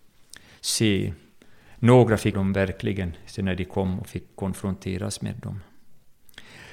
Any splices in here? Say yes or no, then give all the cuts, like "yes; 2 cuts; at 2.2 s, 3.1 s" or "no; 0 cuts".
yes; 1 cut; at 2.3 s